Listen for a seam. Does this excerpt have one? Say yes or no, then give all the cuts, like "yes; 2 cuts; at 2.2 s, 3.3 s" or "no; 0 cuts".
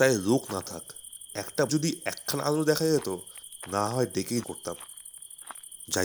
yes; 2 cuts; at 1.7 s, 4.4 s